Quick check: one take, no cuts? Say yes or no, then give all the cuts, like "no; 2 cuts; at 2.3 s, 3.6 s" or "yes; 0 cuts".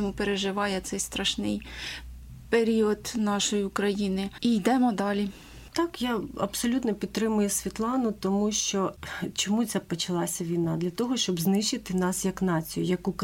yes; 0 cuts